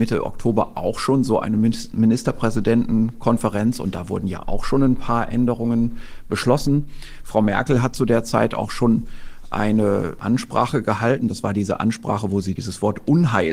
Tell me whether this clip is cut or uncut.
uncut